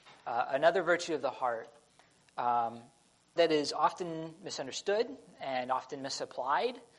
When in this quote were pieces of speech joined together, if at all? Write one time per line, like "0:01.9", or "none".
0:03.4